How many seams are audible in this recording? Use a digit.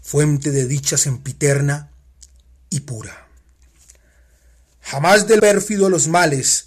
1